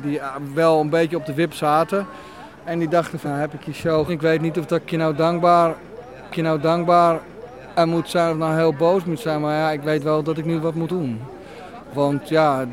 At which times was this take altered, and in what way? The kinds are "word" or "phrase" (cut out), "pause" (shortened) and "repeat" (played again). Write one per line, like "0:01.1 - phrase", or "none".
0:03.2 - word
0:04.1 - word
0:06.3 - repeat
0:10.9 - word